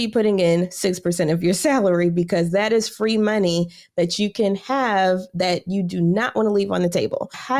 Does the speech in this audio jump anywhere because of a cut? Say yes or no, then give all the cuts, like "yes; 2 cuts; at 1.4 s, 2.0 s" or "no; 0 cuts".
no; 0 cuts